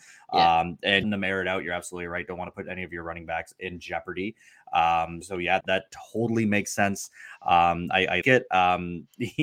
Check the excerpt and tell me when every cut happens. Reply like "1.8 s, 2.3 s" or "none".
1.0 s, 5.2 s, 5.6 s, 8.2 s